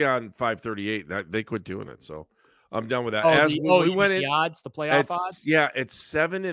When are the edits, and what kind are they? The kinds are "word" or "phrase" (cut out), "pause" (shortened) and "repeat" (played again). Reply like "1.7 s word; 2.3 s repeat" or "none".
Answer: none